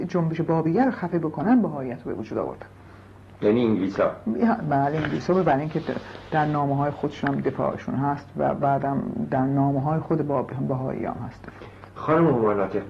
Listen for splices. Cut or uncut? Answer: uncut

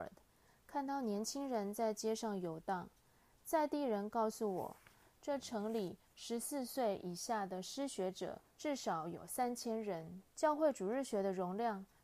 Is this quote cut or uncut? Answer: cut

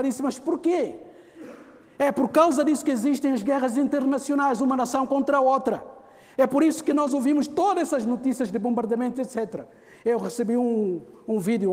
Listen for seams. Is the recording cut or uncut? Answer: uncut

